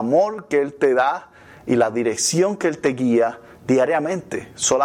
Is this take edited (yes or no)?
no